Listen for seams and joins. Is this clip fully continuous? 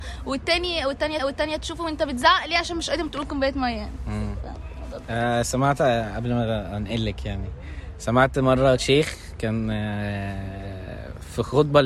no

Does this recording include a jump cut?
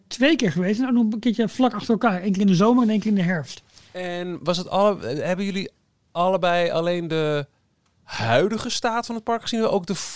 no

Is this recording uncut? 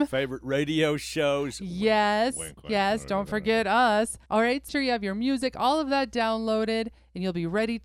no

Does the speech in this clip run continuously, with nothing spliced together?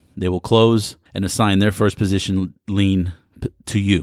no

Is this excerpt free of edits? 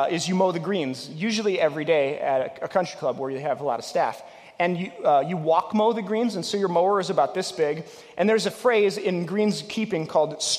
yes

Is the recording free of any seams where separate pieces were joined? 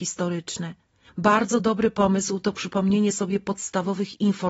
yes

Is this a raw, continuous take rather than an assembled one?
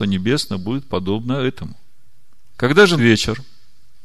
no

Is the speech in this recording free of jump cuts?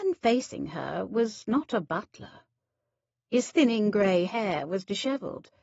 yes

